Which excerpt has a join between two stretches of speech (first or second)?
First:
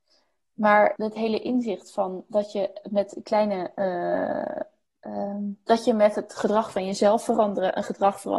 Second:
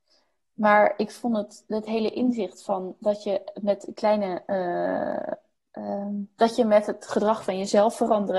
first